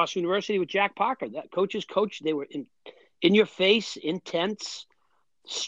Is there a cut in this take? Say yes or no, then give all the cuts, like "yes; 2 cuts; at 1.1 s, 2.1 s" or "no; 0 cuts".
no; 0 cuts